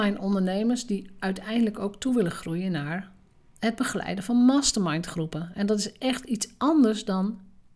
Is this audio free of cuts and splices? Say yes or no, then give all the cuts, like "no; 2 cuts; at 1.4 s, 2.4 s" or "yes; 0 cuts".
yes; 0 cuts